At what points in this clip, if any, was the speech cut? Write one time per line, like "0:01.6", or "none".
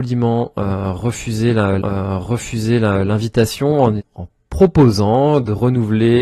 0:01.8
0:04.0